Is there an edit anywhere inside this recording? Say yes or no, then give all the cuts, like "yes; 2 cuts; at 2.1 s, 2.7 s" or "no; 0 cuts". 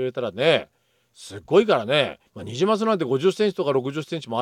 yes; 1 cut; at 2.3 s